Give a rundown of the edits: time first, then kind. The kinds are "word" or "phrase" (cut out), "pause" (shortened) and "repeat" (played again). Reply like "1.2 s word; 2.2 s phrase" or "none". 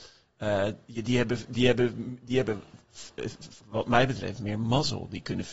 3.6 s pause